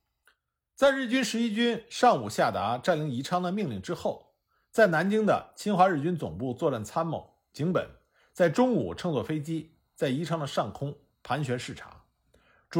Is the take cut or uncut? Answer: uncut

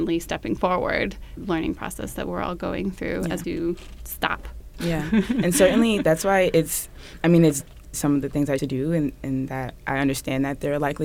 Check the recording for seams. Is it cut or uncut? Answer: cut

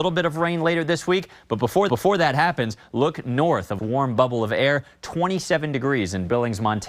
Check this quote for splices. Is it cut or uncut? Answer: cut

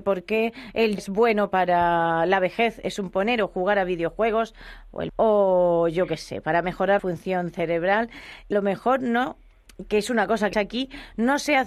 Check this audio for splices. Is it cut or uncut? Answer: cut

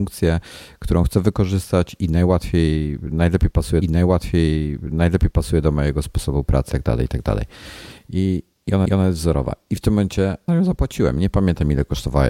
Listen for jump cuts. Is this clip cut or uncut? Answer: cut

